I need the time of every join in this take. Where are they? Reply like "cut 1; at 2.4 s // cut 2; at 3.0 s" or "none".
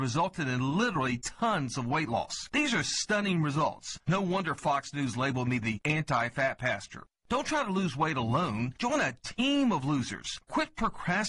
none